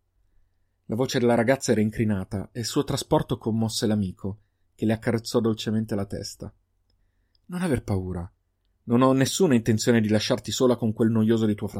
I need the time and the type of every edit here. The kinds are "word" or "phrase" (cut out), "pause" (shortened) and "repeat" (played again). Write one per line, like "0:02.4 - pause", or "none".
none